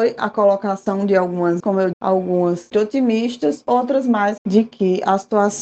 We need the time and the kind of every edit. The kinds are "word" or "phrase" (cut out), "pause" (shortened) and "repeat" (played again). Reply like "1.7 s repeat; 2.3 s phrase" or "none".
1.6 s word; 1.9 s word; 2.7 s word; 4.4 s word